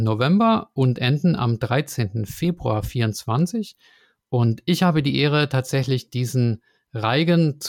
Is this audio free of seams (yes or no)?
yes